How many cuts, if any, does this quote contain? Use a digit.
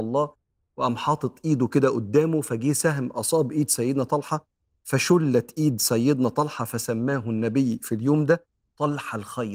0